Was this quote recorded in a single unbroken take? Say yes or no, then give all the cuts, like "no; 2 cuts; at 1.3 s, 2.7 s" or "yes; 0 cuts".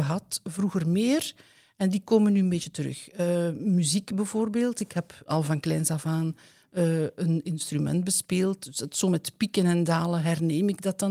no; 1 cut; at 5.3 s